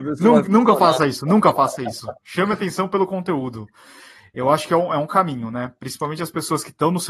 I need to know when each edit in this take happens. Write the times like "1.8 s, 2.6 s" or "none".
none